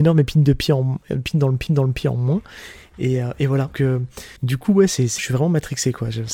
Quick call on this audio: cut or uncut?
cut